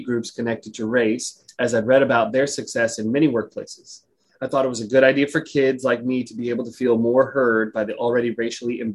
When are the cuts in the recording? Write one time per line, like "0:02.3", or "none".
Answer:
none